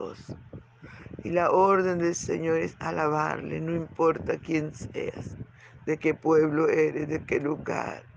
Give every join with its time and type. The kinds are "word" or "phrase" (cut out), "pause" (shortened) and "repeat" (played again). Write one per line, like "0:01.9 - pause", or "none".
none